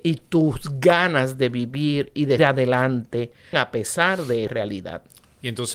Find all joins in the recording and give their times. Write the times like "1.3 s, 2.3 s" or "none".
2.4 s, 3.5 s, 4.5 s